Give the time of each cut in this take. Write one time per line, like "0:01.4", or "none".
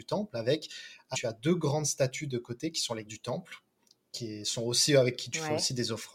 0:01.1
0:03.1